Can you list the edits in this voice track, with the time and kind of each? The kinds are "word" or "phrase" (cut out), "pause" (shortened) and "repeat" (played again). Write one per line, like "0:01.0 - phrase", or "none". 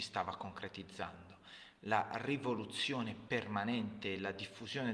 none